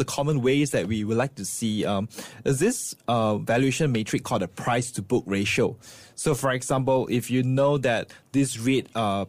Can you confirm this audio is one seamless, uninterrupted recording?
yes; 0 cuts

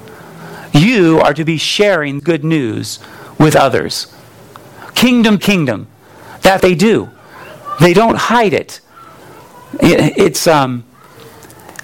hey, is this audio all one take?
no; 3 cuts; at 2.2 s, 5.4 s, 6.6 s

